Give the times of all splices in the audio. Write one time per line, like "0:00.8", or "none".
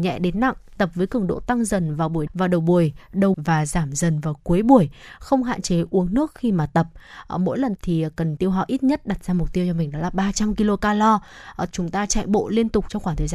0:02.3
0:03.3
0:07.8
0:08.4
0:11.7